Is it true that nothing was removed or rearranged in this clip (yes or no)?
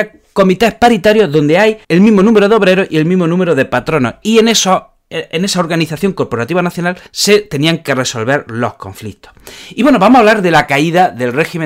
no